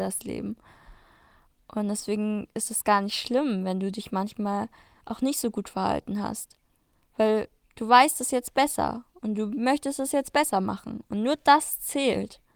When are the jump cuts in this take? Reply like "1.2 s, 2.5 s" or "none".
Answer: none